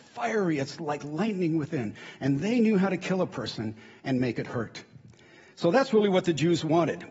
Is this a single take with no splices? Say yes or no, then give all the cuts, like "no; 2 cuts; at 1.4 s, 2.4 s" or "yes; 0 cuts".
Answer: yes; 0 cuts